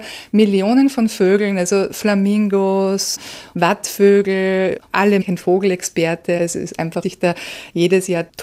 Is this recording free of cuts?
no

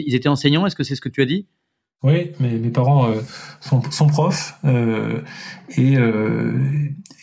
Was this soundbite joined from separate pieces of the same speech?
no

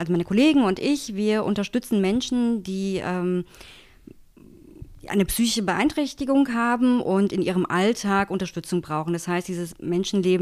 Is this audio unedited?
yes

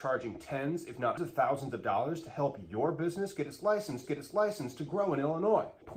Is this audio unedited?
no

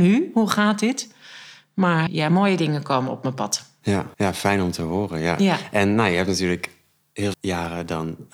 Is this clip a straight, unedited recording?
no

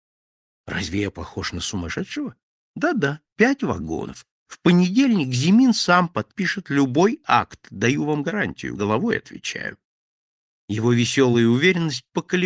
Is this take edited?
no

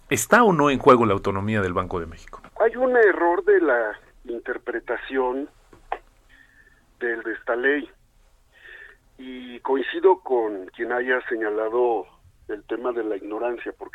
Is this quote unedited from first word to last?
no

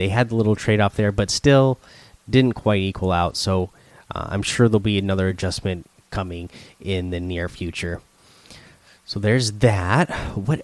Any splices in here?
no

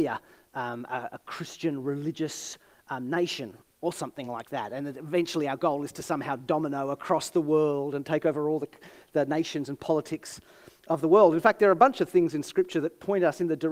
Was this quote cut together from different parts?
no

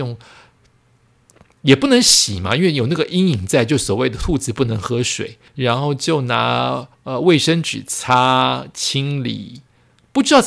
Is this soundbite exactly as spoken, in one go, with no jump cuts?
no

